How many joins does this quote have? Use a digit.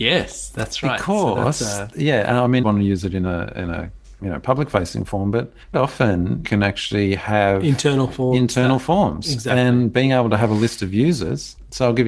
4